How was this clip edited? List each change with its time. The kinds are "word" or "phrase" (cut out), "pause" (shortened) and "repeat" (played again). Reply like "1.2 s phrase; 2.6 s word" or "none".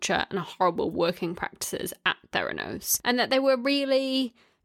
none